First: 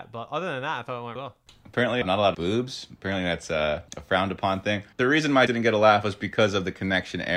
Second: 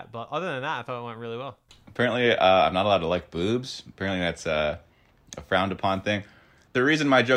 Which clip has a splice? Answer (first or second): first